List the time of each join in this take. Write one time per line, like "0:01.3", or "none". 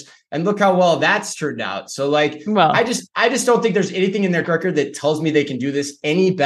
0:04.4